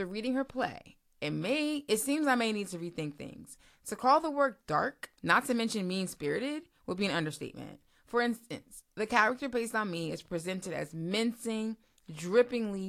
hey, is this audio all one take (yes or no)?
no